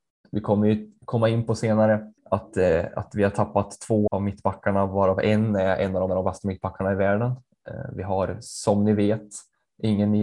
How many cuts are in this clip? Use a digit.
3